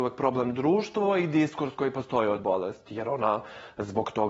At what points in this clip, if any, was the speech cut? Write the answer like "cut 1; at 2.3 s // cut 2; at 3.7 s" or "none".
cut 1; at 2.4 s